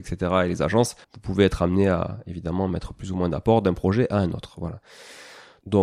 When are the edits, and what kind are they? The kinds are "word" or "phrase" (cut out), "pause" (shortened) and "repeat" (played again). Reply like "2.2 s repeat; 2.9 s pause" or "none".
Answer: 1.0 s pause